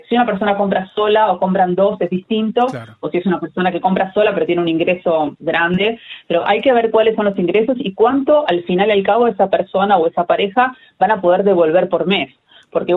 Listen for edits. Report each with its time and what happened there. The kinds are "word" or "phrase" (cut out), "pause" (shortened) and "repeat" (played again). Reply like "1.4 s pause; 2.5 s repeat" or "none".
none